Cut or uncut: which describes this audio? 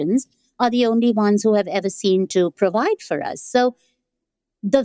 uncut